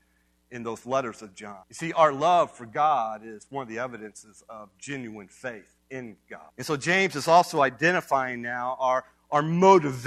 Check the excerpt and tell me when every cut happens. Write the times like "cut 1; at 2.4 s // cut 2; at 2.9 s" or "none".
cut 1; at 1.6 s // cut 2; at 6.5 s